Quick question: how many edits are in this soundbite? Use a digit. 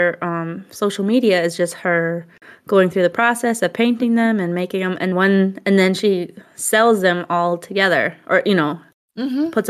1